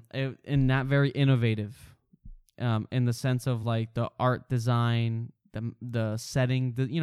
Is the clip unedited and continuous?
yes; 0 cuts

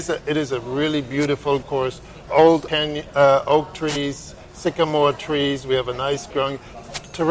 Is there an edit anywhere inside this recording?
yes; 4 cuts; at 1.6 s, 2.3 s, 2.7 s, 6.3 s

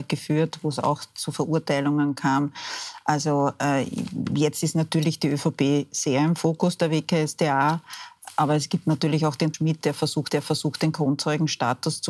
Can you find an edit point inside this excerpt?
yes; 2 cuts; at 9.5 s, 10.3 s

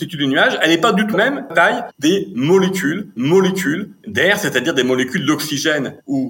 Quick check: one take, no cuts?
no; 3 cuts; at 1.1 s, 1.5 s, 3.2 s

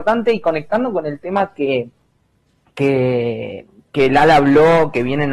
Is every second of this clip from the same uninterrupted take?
yes; 0 cuts

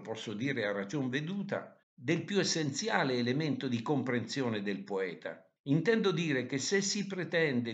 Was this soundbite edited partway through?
yes; 2 cuts; at 1.8 s, 5.6 s

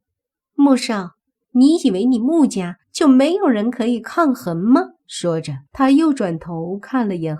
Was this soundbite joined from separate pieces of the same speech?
yes; 4 cuts; at 1.4 s, 2.8 s, 5.0 s, 5.7 s

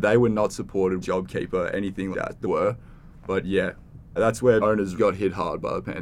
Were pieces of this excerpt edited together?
yes; 6 cuts; at 1.0 s, 2.1 s, 2.4 s, 4.2 s, 4.6 s, 5.0 s

